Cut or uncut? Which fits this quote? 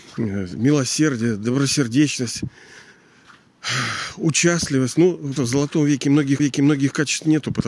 cut